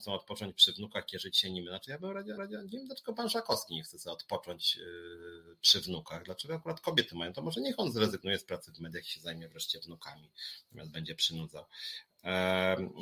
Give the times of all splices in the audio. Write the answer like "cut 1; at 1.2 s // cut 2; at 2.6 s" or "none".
cut 1; at 2.4 s